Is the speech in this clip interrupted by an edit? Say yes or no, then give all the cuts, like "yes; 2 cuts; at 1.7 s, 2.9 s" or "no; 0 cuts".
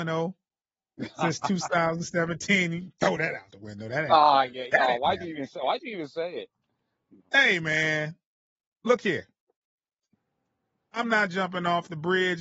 no; 0 cuts